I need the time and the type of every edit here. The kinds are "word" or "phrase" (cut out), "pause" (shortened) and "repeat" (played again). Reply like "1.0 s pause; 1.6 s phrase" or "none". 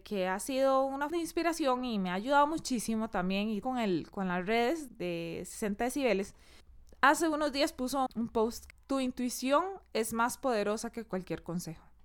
1.1 s word; 3.6 s word; 4.1 s word; 4.9 s word; 8.1 s word; 8.7 s word